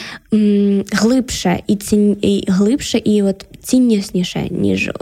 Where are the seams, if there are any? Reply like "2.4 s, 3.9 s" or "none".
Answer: none

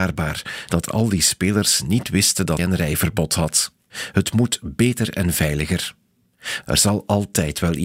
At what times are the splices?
2.6 s

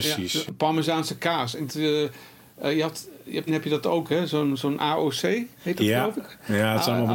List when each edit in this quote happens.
1.7 s, 3.5 s, 5.5 s

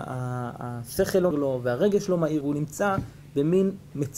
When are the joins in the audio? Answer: 1.3 s, 2.4 s

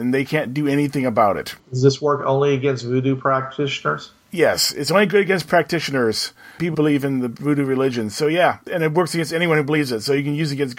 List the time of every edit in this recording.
4.2 s, 6.7 s

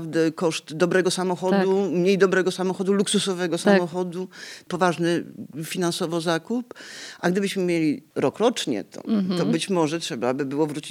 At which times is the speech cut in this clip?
none

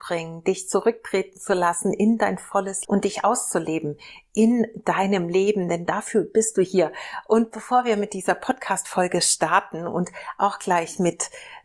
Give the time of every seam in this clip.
2.8 s

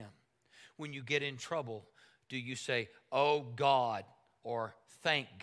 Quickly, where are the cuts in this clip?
none

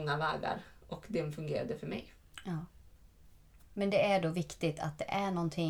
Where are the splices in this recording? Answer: none

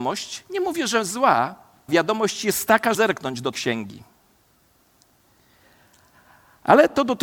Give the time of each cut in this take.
1.9 s, 2.9 s, 3.5 s

